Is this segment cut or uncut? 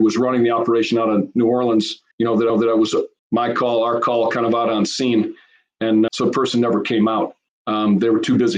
cut